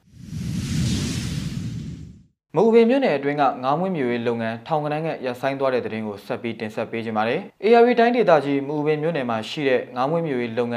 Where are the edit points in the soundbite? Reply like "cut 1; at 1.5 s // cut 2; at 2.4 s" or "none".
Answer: none